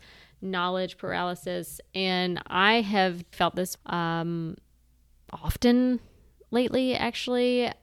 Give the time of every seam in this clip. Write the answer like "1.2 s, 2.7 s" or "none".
3.3 s, 3.8 s